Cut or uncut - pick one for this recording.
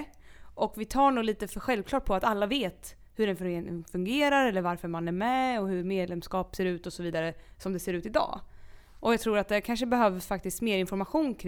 uncut